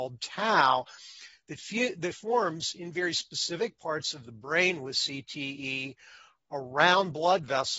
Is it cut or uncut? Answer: uncut